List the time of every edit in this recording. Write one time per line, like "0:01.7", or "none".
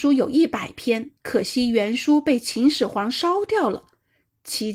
0:01.2

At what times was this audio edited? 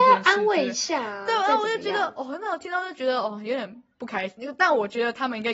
none

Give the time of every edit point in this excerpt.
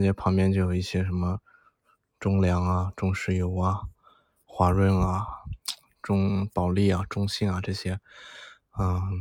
none

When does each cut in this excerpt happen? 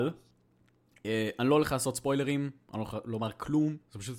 none

